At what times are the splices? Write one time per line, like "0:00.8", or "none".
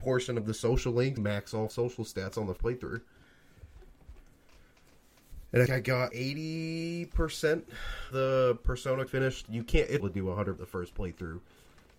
0:01.2
0:01.7
0:02.6
0:05.7
0:06.1
0:08.1
0:09.1
0:10.0
0:10.6